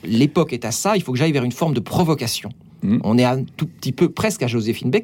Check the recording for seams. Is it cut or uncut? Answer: uncut